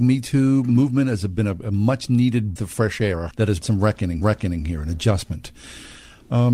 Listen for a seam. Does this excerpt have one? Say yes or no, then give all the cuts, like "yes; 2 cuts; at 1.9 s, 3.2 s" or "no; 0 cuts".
yes; 4 cuts; at 2.6 s, 3.3 s, 3.6 s, 4.2 s